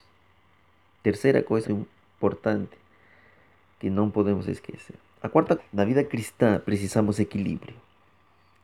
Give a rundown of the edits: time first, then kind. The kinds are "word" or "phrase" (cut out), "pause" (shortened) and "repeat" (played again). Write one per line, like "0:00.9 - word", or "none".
0:01.6 - word
0:05.6 - word